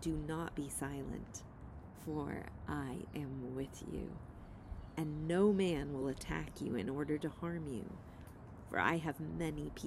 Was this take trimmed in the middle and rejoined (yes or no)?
no